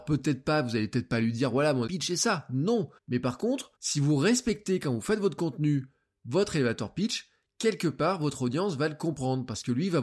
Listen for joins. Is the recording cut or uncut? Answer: cut